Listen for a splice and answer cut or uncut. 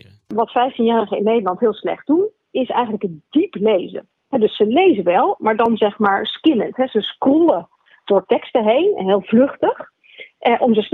uncut